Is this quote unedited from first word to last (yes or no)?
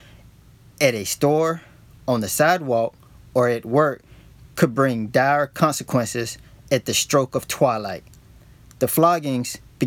yes